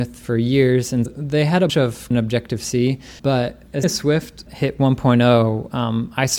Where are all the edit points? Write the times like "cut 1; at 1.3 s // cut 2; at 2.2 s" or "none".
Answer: cut 1; at 1.1 s // cut 2; at 1.7 s // cut 3; at 2.1 s // cut 4; at 3.2 s // cut 5; at 3.8 s // cut 6; at 4.5 s